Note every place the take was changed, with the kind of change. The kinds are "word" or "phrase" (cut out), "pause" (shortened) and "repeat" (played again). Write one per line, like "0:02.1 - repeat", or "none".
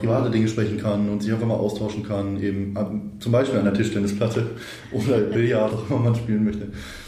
0:05.7 - phrase